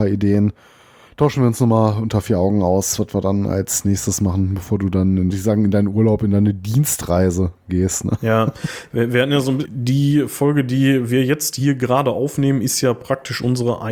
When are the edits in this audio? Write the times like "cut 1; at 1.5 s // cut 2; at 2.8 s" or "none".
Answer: cut 1; at 5.3 s // cut 2; at 9.6 s